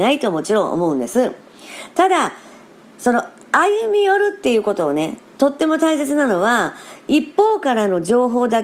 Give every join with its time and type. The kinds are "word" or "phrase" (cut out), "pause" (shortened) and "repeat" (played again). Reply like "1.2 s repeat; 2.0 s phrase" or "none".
none